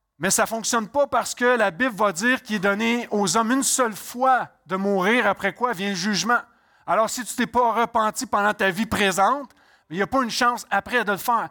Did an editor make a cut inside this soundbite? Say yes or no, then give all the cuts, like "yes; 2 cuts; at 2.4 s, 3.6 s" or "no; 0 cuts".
no; 0 cuts